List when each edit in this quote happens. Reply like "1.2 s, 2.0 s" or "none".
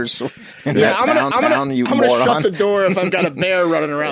1.3 s